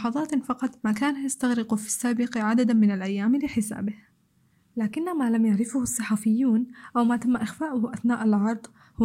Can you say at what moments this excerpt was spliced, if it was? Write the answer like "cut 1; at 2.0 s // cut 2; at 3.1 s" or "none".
none